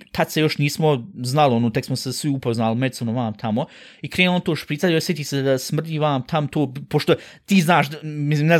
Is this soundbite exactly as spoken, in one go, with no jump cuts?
yes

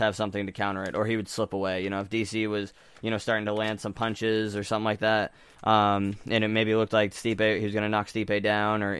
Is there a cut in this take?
no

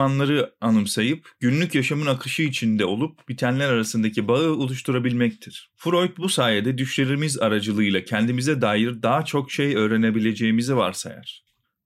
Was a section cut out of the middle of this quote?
no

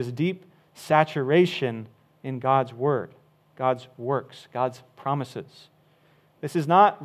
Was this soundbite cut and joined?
no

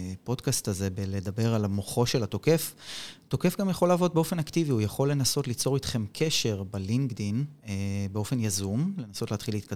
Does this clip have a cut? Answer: no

